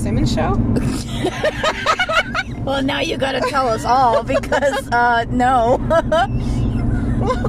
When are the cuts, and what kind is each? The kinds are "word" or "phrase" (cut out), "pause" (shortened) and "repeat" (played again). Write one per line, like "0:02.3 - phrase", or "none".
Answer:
none